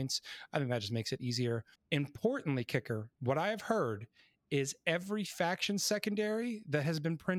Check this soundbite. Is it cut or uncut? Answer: cut